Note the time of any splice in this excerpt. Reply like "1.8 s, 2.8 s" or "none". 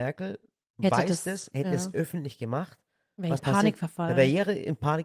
3.4 s